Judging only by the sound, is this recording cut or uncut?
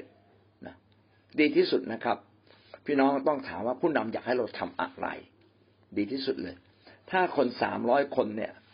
uncut